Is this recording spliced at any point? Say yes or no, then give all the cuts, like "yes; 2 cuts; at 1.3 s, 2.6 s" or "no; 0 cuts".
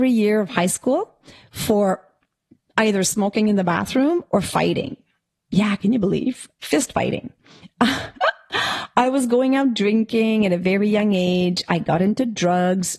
no; 0 cuts